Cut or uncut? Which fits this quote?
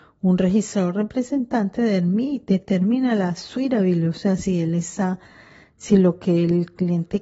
uncut